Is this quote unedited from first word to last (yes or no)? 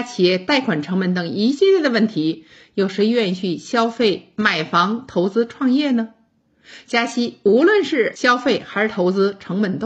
yes